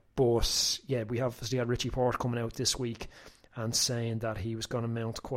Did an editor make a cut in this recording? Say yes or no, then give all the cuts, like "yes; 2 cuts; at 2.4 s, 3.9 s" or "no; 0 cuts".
no; 0 cuts